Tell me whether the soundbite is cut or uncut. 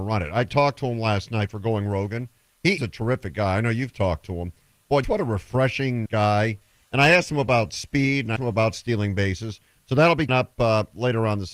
cut